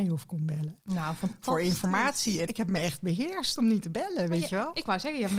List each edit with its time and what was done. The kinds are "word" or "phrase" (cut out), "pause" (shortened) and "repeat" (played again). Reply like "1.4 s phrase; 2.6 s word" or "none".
2.5 s word